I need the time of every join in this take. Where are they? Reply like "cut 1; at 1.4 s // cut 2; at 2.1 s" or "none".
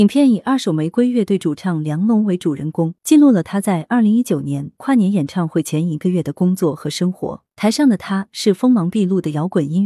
cut 1; at 3.0 s // cut 2; at 7.5 s